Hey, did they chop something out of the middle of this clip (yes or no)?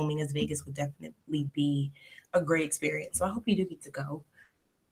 no